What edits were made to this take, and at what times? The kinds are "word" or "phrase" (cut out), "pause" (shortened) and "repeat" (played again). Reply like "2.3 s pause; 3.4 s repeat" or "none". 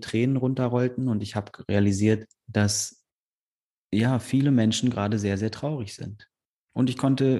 2.3 s pause